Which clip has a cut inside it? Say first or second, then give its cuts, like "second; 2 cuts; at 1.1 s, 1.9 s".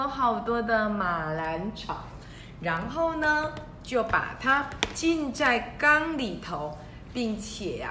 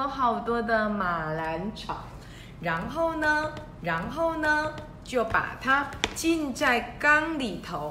second; 1 cut; at 3.8 s